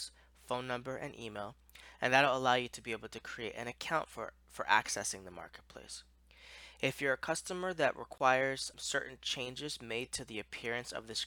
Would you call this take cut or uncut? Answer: cut